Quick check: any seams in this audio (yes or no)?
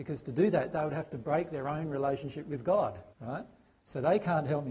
yes